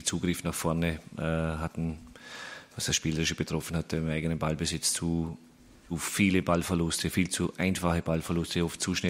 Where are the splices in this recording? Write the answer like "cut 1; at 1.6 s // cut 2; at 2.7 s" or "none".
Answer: none